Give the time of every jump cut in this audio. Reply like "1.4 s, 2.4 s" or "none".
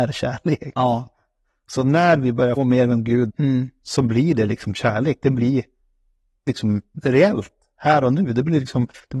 2.6 s, 3.3 s, 6.5 s